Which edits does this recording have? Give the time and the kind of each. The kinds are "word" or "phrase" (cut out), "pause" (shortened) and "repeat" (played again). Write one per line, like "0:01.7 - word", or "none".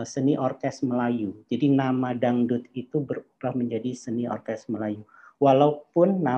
none